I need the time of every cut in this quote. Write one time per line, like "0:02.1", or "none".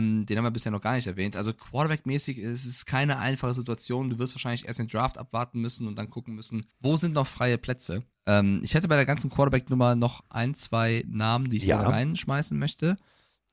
0:06.7
0:08.1